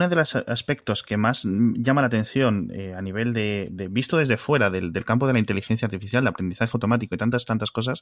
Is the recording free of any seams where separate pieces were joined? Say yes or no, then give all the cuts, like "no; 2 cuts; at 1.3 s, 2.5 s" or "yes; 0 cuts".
yes; 0 cuts